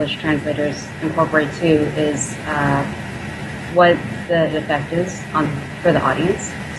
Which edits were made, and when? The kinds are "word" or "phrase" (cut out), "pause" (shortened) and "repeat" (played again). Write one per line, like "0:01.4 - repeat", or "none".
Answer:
0:04.5 - word